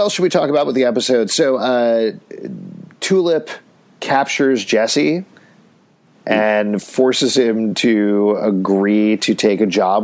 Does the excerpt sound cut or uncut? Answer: uncut